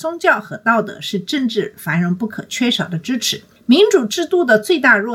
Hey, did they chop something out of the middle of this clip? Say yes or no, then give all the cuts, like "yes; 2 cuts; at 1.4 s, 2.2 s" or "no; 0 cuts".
no; 0 cuts